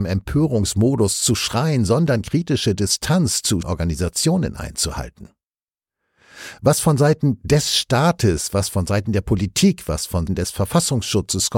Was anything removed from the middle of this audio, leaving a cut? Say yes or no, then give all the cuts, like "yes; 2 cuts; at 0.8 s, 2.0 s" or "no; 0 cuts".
yes; 2 cuts; at 3.6 s, 10.3 s